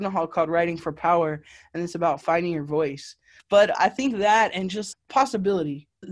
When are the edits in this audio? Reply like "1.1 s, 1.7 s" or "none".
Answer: 4.9 s